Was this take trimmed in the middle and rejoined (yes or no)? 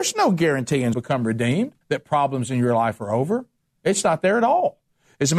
yes